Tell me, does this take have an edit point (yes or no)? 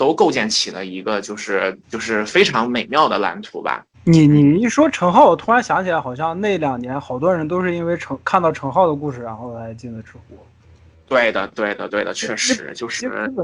yes